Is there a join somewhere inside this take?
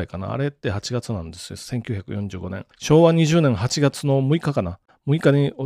yes; 1 cut; at 2.7 s

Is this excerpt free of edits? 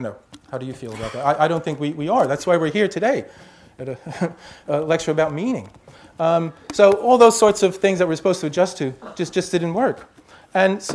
yes; 0 cuts

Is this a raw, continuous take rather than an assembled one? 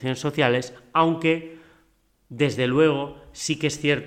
yes; 0 cuts

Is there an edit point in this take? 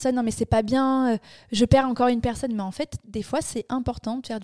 no; 0 cuts

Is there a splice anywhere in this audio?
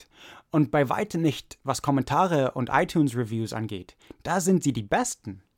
no; 0 cuts

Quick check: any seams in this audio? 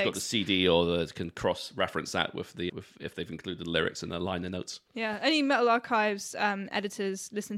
yes; 1 cut; at 2.7 s

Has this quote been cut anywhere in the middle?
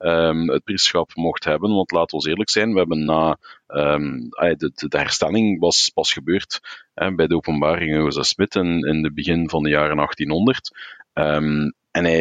no; 0 cuts

